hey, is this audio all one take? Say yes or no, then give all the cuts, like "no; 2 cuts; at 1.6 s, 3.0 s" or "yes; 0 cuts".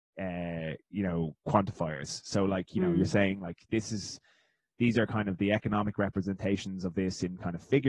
yes; 0 cuts